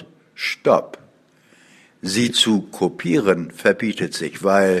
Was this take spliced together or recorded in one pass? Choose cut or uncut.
uncut